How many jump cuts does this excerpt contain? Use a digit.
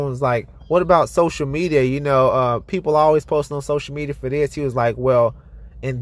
0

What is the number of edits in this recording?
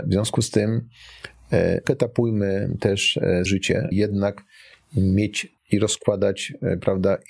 4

